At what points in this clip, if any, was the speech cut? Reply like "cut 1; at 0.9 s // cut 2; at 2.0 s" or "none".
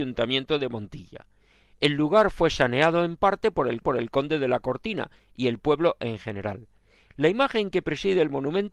cut 1; at 3.8 s